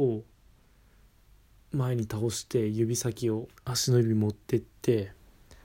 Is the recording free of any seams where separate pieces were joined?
no; 1 cut; at 3.6 s

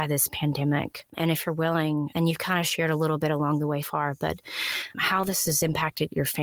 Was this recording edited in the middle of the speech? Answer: yes; 3 cuts; at 2.1 s, 3.8 s, 4.9 s

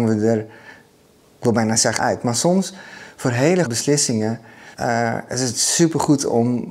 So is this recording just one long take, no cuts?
no; 3 cuts; at 2.0 s, 3.6 s, 4.7 s

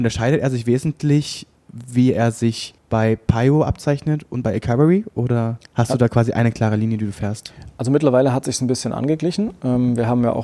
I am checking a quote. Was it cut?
yes; 2 cuts; at 2.8 s, 5.7 s

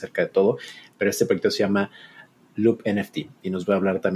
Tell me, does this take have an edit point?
no; 0 cuts

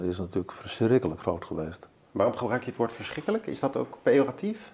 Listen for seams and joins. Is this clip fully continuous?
yes; 0 cuts

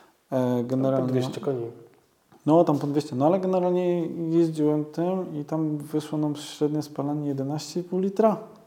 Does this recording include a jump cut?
no; 0 cuts

